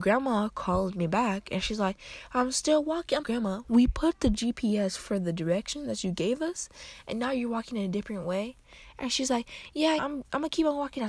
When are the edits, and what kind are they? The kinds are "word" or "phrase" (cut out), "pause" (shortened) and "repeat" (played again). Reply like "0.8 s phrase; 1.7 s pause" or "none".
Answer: 3.2 s word; 10.0 s phrase